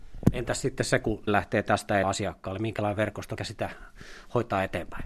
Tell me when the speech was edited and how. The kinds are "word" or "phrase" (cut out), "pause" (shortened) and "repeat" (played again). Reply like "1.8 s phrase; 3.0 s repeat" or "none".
1.3 s word; 2.0 s word; 3.4 s word